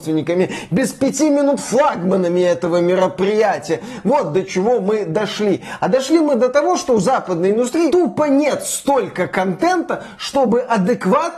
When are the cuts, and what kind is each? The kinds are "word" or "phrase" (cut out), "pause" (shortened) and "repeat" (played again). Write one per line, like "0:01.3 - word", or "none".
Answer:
none